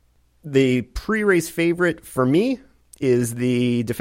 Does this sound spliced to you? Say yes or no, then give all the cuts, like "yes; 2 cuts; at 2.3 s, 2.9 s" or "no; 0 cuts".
no; 0 cuts